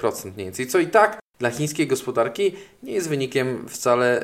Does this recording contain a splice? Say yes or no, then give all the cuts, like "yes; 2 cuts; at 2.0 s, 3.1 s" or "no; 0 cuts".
no; 0 cuts